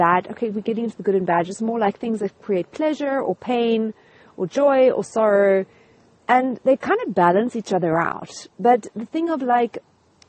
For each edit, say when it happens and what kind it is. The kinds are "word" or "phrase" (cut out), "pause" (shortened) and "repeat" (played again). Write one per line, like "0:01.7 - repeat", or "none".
0:08.5 - pause